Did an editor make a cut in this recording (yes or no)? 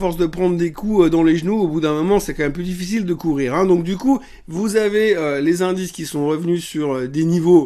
no